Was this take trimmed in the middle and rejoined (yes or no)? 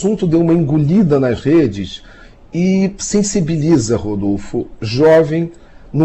no